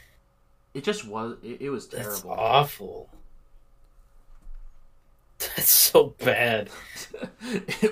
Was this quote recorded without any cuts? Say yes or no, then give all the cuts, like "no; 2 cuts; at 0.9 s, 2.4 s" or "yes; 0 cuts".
yes; 0 cuts